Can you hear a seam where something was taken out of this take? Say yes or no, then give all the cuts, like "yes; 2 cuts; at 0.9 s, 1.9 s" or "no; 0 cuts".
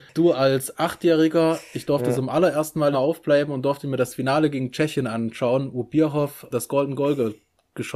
yes; 2 cuts; at 2.9 s, 6.5 s